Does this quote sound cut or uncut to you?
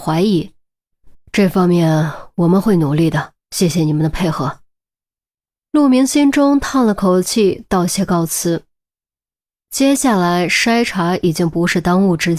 cut